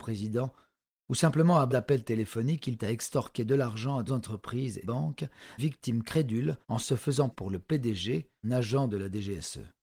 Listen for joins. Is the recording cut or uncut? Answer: cut